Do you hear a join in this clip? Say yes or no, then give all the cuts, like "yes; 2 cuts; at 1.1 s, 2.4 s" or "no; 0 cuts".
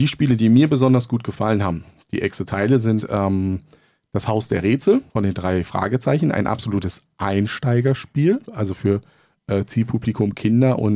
yes; 1 cut; at 5.1 s